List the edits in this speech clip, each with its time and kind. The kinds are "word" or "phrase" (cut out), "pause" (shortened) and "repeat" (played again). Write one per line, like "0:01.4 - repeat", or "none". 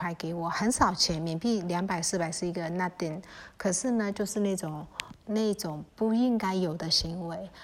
0:05.2 - word
0:05.9 - pause